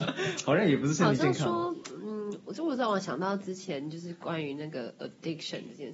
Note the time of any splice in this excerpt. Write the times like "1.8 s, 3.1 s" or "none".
none